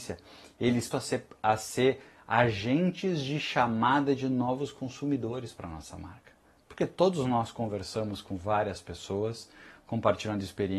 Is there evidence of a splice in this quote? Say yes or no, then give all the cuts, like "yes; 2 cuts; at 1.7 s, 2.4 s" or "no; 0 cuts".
yes; 1 cut; at 0.9 s